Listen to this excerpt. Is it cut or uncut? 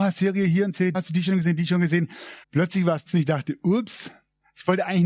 cut